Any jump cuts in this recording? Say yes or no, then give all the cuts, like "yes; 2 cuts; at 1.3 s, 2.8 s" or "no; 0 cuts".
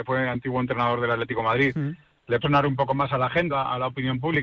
yes; 2 cuts; at 2.4 s, 3.5 s